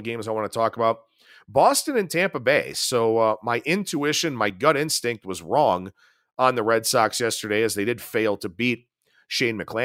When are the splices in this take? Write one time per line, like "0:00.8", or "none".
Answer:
none